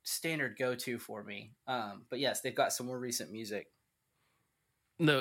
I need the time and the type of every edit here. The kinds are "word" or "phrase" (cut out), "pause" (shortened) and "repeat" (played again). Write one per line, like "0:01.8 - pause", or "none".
none